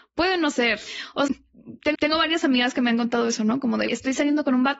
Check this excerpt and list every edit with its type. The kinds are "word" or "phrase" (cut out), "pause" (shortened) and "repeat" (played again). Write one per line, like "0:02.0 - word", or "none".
0:01.3 - word
0:01.9 - repeat
0:03.9 - word